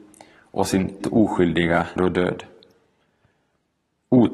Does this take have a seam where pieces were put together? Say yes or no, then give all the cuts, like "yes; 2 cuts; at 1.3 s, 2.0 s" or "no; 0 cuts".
yes; 2 cuts; at 1.0 s, 2.0 s